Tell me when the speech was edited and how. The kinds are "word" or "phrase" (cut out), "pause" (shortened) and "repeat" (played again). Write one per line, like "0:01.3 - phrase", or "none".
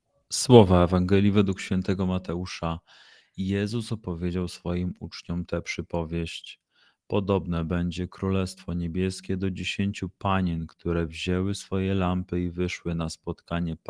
none